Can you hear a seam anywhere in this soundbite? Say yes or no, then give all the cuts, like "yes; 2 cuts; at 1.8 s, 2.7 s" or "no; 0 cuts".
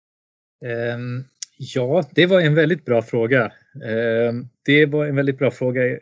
yes; 1 cut; at 4.5 s